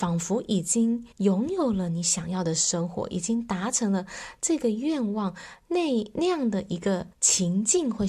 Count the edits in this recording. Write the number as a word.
two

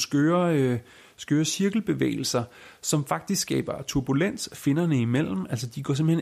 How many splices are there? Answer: zero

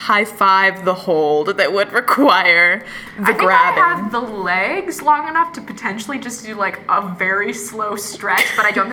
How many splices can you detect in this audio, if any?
zero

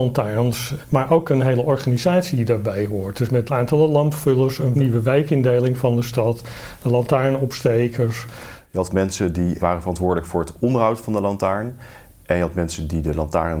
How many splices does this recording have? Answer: one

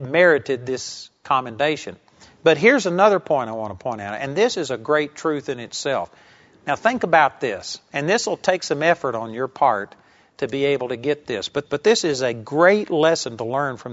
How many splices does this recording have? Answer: one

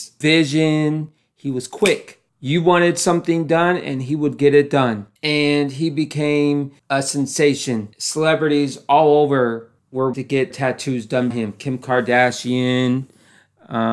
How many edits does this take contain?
six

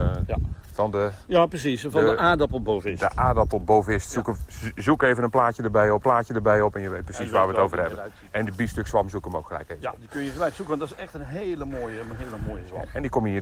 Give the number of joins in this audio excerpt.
one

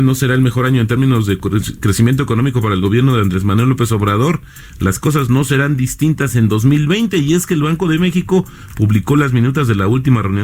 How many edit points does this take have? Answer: zero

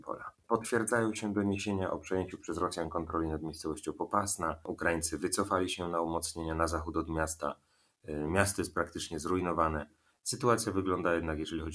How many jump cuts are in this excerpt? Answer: zero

